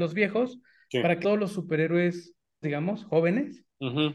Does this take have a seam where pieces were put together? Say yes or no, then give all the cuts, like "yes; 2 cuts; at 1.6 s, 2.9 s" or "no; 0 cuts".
yes; 2 cuts; at 1.2 s, 2.6 s